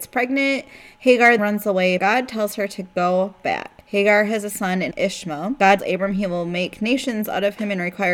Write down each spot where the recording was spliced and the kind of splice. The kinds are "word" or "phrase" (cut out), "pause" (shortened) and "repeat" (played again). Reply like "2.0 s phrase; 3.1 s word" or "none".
1.4 s word; 2.0 s word; 3.8 s pause; 4.9 s phrase; 5.8 s word